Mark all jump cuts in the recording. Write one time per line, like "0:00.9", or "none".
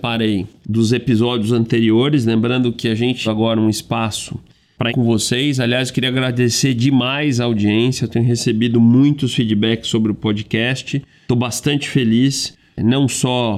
0:03.2
0:04.9